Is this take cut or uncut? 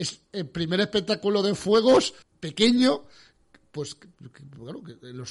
cut